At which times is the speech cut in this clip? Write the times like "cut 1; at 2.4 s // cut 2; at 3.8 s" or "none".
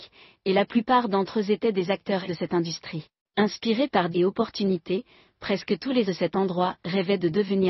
cut 1; at 2.3 s // cut 2; at 3.2 s // cut 3; at 4.1 s // cut 4; at 6.0 s